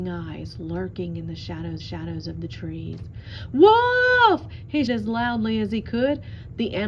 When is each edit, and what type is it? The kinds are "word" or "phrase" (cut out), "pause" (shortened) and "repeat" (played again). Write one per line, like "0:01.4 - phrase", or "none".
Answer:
0:01.8 - repeat
0:04.9 - word